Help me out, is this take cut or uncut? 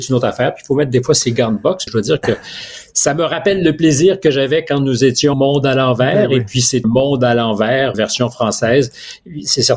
cut